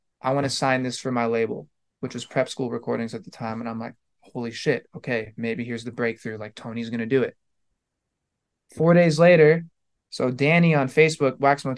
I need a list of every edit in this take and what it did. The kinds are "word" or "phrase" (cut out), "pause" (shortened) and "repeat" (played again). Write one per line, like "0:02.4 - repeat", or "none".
none